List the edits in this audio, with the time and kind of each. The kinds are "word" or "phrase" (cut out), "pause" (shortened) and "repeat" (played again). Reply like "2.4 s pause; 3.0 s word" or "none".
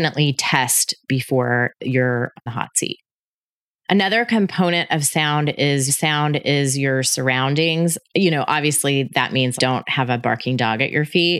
2.5 s word; 5.9 s repeat; 9.6 s word